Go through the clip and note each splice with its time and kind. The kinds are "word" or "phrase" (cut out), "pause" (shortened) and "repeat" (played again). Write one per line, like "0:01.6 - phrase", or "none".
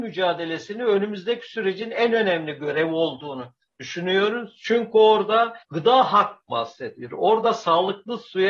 0:05.6 - pause
0:06.5 - phrase